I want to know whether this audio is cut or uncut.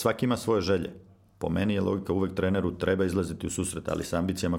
uncut